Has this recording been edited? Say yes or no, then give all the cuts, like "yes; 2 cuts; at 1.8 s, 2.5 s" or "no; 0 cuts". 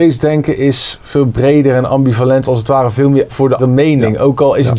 yes; 3 cuts; at 2.4 s, 3.3 s, 3.6 s